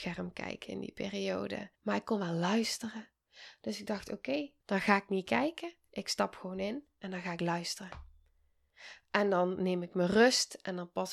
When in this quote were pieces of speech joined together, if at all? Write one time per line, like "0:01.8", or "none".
0:01.8
0:04.6